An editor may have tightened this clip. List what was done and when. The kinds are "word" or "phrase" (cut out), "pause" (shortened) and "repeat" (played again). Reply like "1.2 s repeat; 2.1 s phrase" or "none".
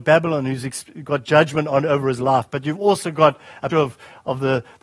3.7 s word